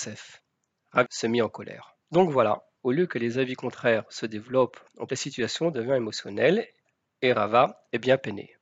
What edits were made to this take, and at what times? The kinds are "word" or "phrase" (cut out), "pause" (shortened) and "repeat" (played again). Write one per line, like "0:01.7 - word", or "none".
0:01.1 - word
0:02.0 - pause
0:02.8 - pause
0:05.1 - word